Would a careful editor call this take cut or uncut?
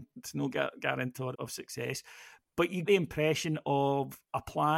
cut